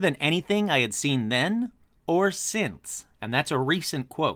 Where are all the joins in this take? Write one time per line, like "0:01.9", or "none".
none